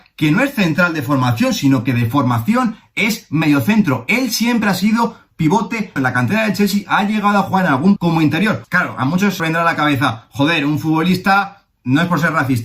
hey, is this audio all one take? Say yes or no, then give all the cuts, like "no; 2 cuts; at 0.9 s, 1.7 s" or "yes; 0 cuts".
no; 4 cuts; at 6.0 s, 8.0 s, 8.7 s, 9.4 s